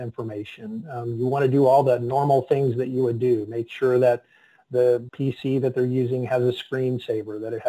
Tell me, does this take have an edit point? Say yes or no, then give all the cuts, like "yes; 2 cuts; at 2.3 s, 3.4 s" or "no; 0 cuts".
no; 0 cuts